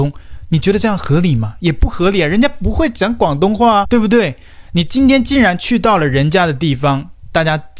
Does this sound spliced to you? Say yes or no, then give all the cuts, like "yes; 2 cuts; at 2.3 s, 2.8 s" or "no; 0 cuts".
yes; 1 cut; at 3.8 s